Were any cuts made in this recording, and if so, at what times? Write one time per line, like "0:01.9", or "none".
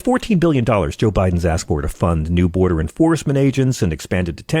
none